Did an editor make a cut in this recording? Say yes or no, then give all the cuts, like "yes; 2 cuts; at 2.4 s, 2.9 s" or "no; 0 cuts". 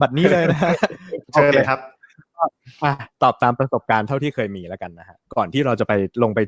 yes; 2 cuts; at 1.2 s, 5.2 s